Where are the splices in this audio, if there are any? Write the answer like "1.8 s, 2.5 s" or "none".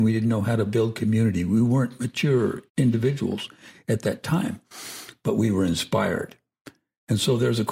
2.7 s

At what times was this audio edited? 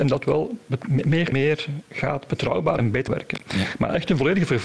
1.3 s, 2.8 s, 3.1 s

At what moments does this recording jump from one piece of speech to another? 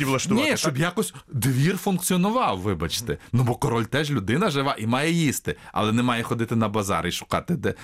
none

